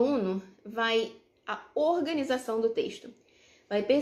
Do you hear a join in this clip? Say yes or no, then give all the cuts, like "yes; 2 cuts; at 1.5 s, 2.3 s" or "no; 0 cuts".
yes; 1 cut; at 1.3 s